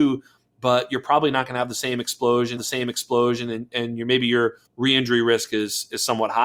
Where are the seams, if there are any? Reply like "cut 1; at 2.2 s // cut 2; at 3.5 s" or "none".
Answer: cut 1; at 2.6 s // cut 2; at 4.7 s